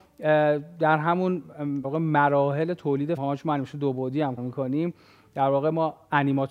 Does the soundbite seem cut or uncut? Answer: cut